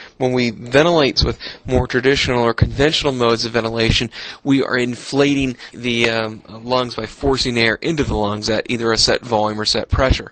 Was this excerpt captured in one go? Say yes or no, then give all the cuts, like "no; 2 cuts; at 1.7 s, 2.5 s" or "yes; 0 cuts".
no; 2 cuts; at 1.2 s, 5.7 s